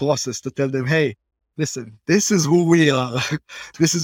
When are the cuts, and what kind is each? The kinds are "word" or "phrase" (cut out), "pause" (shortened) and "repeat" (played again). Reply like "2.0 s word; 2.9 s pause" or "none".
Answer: none

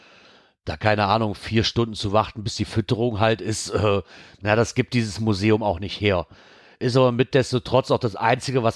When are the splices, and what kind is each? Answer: none

